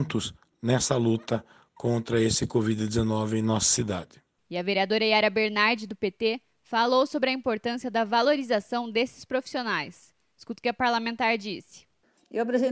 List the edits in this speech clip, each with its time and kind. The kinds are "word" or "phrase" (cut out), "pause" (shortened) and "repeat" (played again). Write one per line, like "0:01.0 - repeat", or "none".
none